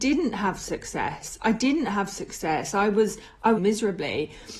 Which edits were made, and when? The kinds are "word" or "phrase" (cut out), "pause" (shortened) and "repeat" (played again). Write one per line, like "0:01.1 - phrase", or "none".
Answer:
0:03.6 - phrase